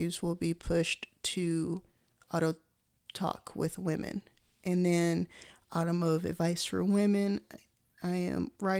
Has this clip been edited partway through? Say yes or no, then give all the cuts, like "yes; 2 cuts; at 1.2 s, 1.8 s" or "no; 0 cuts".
no; 0 cuts